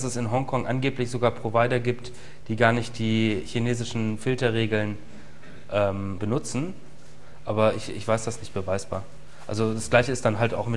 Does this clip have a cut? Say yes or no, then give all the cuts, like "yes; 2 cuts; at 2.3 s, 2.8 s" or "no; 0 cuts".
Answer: yes; 1 cut; at 6.2 s